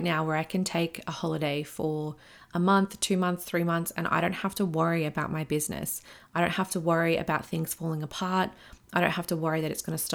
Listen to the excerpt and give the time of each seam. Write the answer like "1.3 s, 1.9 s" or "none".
none